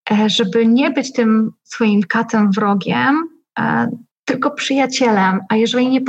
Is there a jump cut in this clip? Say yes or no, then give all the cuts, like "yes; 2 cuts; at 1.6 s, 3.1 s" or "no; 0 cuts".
yes; 1 cut; at 4.1 s